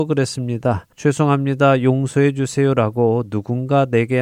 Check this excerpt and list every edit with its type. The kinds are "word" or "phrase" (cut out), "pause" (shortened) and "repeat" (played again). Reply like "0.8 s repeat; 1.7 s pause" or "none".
0.9 s pause